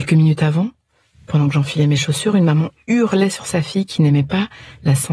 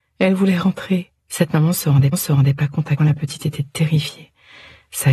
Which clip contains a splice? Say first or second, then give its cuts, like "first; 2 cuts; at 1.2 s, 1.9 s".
second; 3 cuts; at 1.2 s, 2.1 s, 3.0 s